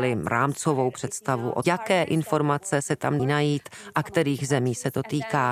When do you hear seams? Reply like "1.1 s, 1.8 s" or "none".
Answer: 1.6 s, 3.2 s